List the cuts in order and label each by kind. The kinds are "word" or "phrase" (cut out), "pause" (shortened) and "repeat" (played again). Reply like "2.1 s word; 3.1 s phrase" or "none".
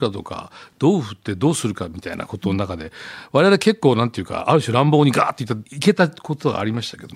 5.7 s pause

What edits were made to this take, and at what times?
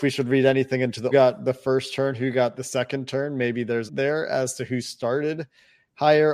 1.1 s phrase; 3.9 s phrase

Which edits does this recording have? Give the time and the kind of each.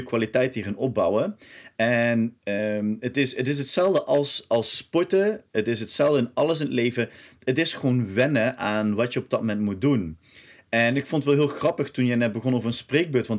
none

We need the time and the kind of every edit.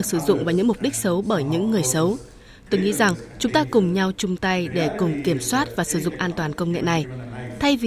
none

